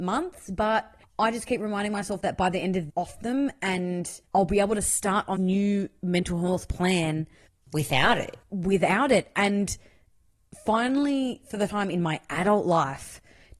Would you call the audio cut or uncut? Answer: cut